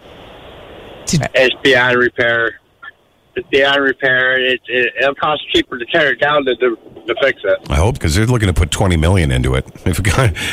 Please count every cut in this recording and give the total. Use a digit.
4